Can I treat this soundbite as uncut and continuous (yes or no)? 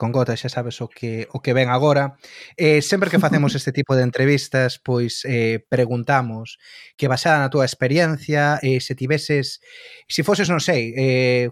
yes